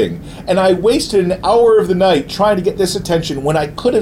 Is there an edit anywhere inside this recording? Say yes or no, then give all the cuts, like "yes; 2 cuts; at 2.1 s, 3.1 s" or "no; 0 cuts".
no; 0 cuts